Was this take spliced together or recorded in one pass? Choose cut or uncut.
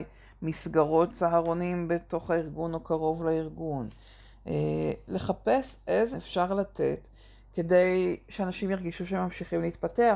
cut